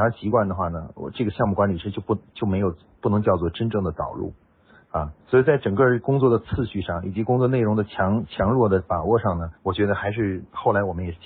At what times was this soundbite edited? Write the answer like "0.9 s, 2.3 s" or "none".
5.2 s, 9.6 s